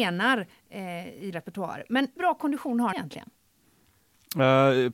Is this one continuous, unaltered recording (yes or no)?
no